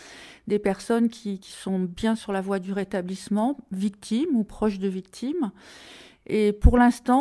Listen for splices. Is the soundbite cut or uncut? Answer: cut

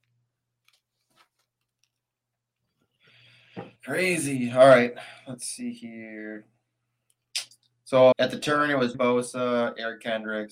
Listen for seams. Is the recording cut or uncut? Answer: cut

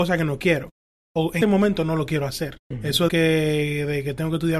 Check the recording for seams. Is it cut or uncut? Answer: cut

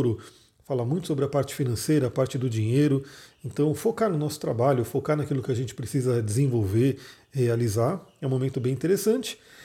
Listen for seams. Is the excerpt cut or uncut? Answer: uncut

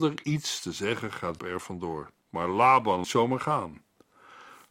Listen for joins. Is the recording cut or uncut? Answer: cut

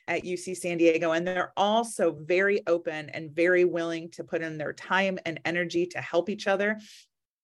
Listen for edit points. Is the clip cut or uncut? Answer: uncut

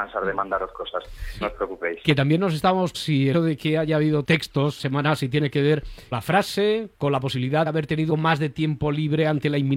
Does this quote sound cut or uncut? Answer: cut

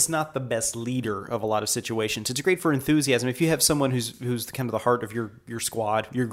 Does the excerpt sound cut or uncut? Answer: uncut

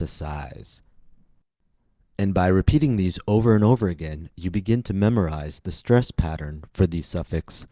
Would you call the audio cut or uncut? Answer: uncut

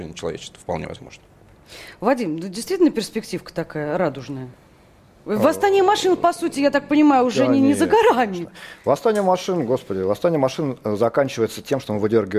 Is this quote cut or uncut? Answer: uncut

